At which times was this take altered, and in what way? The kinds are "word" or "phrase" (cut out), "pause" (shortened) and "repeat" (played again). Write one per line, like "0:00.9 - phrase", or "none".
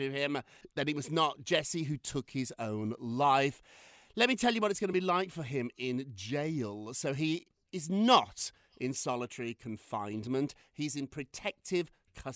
none